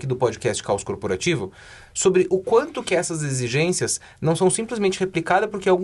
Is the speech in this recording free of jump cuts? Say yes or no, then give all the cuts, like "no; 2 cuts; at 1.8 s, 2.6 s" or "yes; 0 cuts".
yes; 0 cuts